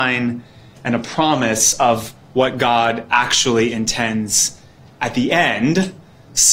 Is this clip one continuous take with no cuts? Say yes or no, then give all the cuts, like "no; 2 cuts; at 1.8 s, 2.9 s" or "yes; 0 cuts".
yes; 0 cuts